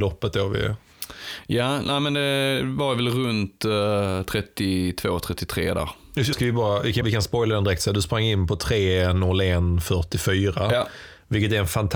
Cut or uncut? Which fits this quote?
cut